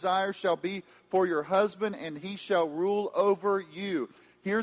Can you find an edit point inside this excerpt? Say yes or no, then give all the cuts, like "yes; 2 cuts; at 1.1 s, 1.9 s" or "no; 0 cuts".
no; 0 cuts